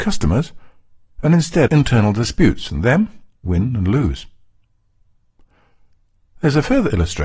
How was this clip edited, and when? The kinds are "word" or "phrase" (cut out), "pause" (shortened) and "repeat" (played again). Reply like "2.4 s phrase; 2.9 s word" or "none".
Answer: 1.7 s word; 2.7 s phrase; 3.5 s word